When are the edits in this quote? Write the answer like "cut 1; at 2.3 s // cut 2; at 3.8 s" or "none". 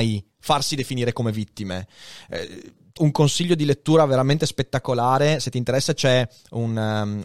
cut 1; at 3.0 s